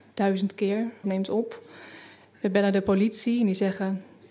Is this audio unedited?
no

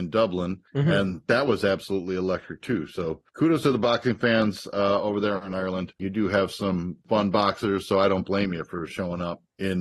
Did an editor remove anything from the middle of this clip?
no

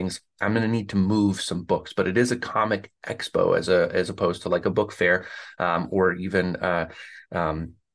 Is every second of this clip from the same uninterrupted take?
yes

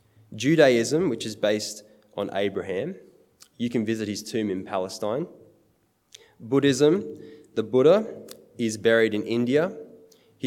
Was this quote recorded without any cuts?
yes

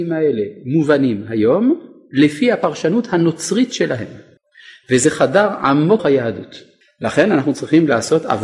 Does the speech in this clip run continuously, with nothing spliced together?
no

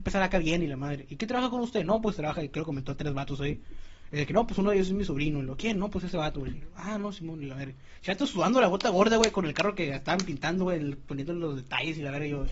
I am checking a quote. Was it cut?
no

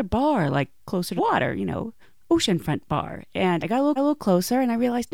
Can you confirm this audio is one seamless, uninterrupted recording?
no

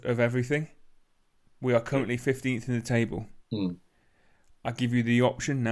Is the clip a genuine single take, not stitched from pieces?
no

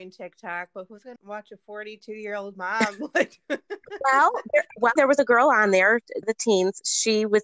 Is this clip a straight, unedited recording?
no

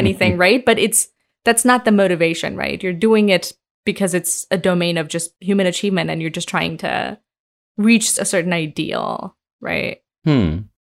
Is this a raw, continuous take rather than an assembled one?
no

